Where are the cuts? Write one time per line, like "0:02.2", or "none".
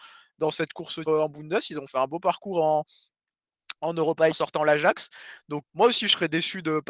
0:01.0
0:04.3
0:05.6